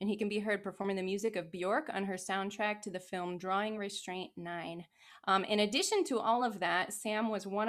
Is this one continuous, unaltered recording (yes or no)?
yes